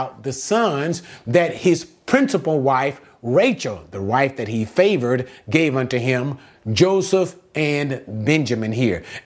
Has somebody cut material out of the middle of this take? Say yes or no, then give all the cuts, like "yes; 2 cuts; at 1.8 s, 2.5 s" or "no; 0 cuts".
no; 0 cuts